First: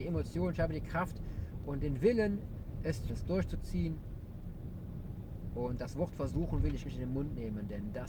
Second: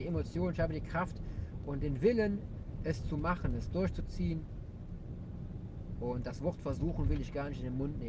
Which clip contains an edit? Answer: first; 2 cuts; at 3.1 s, 6.9 s

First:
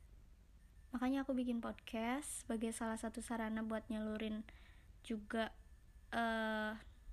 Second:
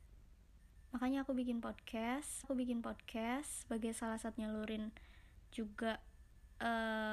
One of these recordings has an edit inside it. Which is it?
second; 2 cuts; at 2.4 s, 4.3 s

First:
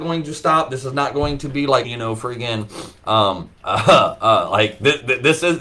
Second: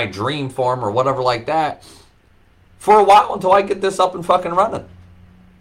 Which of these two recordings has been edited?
first; 2 cuts; at 1.8 s, 3.6 s

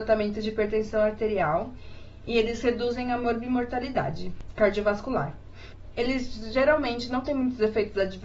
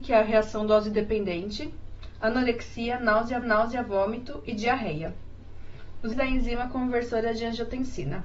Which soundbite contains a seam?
second; 2 cuts; at 3.4 s, 6.1 s

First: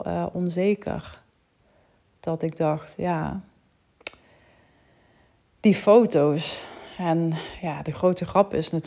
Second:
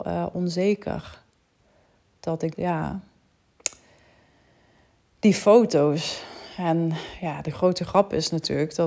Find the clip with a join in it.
second; 1 cut; at 2.5 s

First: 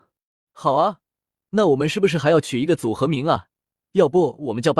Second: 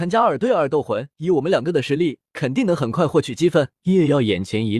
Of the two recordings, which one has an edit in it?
second; 2 cuts; at 1.1 s, 3.8 s

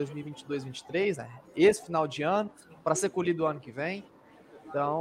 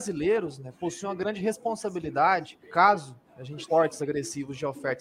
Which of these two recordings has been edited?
second; 2 cuts; at 2.6 s, 3.7 s

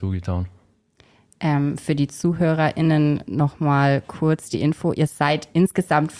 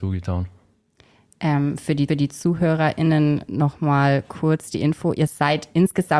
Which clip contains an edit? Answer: second; 1 cut; at 2.1 s

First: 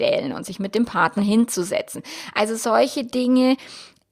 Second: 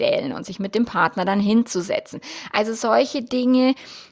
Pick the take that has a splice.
first; 1 cut; at 1.2 s

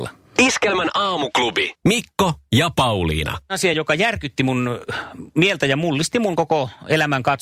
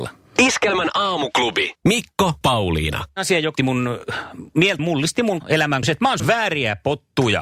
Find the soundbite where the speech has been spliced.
second; 6 cuts; at 2.4 s, 3.6 s, 4.8 s, 5.4 s, 5.8 s, 6.2 s

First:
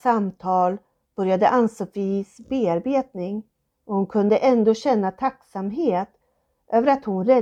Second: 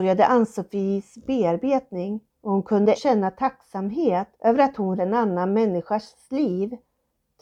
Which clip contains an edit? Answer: second; 4 cuts; at 2.3 s, 2.9 s, 4.3 s, 5.0 s

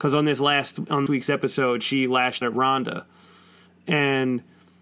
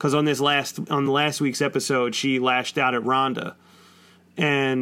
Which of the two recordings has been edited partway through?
first; 2 cuts; at 1.1 s, 2.4 s

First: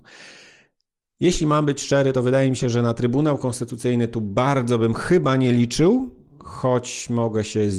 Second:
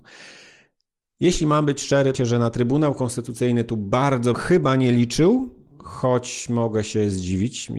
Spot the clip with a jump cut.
second; 2 cuts; at 2.1 s, 4.3 s

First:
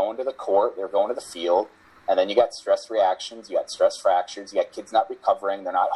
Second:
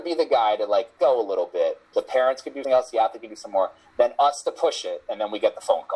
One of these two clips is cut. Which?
second; 3 cuts; at 1.0 s, 1.9 s, 2.6 s

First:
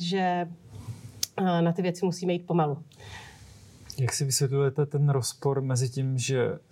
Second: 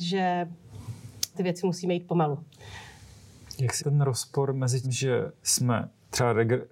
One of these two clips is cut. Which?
second; 3 cuts; at 1.3 s, 3.8 s, 4.8 s

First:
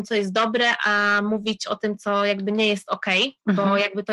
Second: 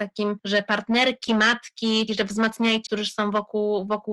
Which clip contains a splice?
second; 2 cuts; at 2.1 s, 2.9 s

